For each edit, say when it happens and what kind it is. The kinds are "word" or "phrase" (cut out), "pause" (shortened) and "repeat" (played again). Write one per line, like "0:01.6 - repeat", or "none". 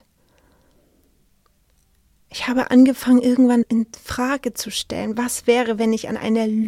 0:03.6 - word